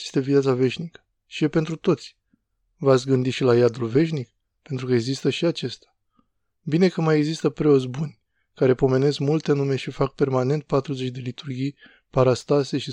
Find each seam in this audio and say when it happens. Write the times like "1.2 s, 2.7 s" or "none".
none